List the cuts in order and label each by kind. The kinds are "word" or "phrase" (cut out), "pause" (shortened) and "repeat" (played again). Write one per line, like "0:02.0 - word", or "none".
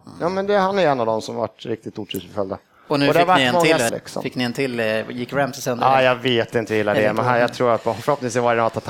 0:03.9 - word